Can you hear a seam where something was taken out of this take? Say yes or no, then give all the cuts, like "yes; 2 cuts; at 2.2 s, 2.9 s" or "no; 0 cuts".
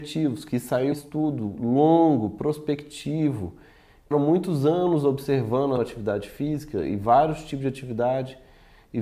yes; 3 cuts; at 0.9 s, 4.1 s, 5.8 s